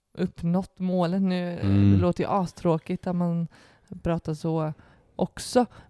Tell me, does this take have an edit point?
no; 0 cuts

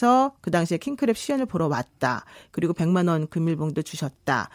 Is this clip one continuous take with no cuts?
yes; 0 cuts

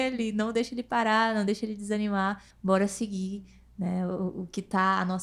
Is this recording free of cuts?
no; 1 cut; at 2.5 s

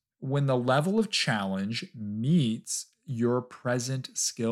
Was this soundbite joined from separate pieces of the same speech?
no; 0 cuts

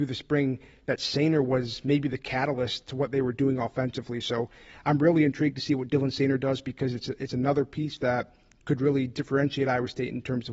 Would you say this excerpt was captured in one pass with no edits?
yes; 0 cuts

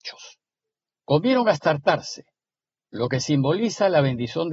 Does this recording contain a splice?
no; 0 cuts

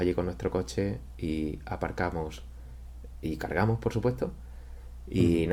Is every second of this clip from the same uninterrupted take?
yes; 0 cuts

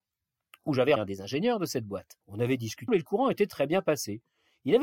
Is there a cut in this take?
yes; 3 cuts; at 1.0 s, 2.2 s, 2.9 s

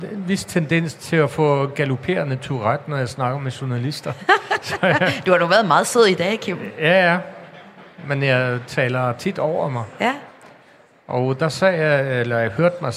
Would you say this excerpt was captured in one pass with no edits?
yes; 0 cuts

